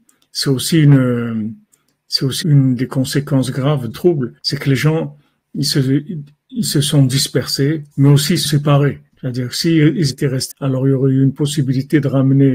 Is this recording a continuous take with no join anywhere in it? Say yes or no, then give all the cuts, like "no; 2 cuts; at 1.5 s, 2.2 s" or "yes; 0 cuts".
no; 9 cuts; at 2.4 s, 2.8 s, 3.9 s, 4.4 s, 7.9 s, 8.5 s, 9.1 s, 10.1 s, 10.5 s